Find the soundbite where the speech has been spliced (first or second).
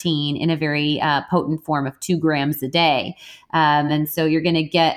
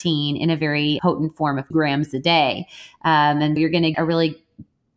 second